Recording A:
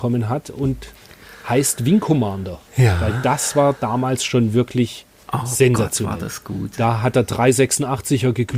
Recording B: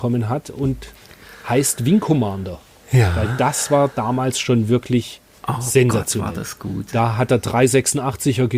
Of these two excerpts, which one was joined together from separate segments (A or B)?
A